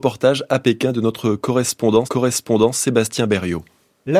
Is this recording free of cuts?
no; 1 cut; at 2.0 s

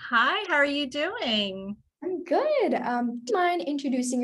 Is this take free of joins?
no; 1 cut; at 3.3 s

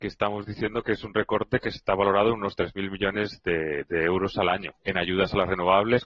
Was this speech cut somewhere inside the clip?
no; 0 cuts

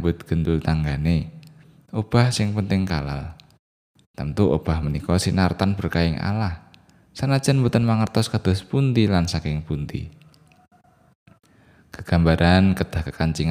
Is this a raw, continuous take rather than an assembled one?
yes; 0 cuts

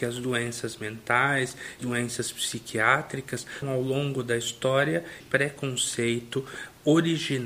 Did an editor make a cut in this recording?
yes; 3 cuts; at 1.8 s, 3.6 s, 5.2 s

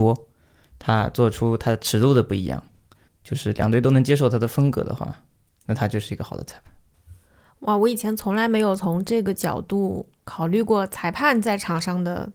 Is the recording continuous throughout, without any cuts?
yes; 0 cuts

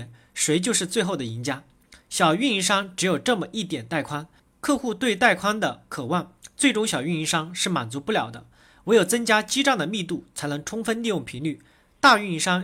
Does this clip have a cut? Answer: yes; 2 cuts; at 2.0 s, 4.4 s

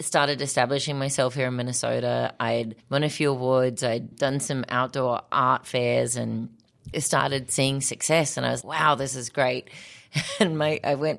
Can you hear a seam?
yes; 4 cuts; at 2.8 s, 4.1 s, 6.9 s, 8.6 s

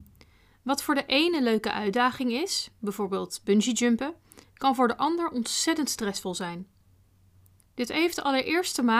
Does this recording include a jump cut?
no; 0 cuts

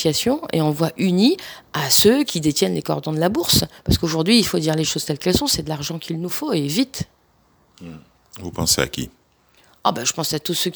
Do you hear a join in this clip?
no; 0 cuts

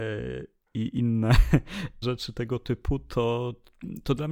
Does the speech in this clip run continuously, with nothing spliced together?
no; 1 cut; at 2.0 s

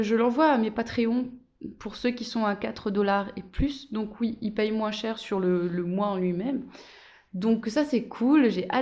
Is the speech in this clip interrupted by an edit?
no; 0 cuts

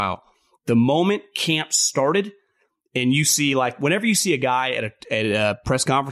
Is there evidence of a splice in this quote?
no; 0 cuts

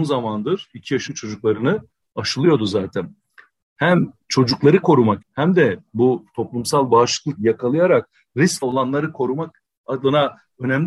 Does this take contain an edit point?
yes; 4 cuts; at 1.1 s, 5.2 s, 7.4 s, 8.6 s

